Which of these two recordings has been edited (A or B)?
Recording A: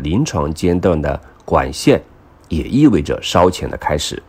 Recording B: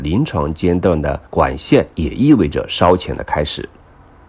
B